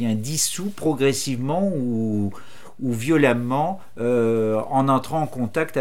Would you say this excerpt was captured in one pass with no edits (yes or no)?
yes